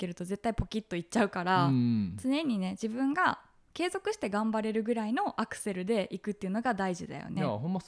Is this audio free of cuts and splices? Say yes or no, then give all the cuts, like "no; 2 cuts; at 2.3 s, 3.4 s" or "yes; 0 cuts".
yes; 0 cuts